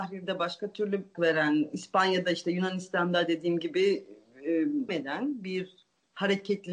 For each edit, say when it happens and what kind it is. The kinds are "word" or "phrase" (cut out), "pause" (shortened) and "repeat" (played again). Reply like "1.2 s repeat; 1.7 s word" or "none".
1.1 s word; 4.9 s word